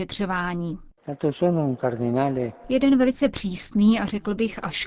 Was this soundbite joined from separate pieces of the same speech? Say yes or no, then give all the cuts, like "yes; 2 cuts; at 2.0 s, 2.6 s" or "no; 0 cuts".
no; 0 cuts